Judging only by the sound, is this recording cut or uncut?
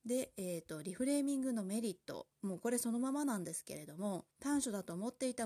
cut